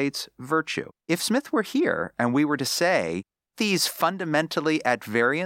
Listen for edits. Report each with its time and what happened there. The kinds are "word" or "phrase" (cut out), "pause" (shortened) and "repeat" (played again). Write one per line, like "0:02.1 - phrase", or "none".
0:01.0 - pause
0:03.5 - word